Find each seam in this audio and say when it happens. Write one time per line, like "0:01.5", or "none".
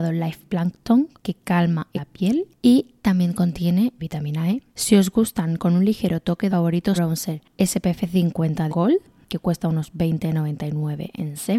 0:01.2
0:01.9
0:04.0
0:04.7
0:06.5
0:07.0
0:08.7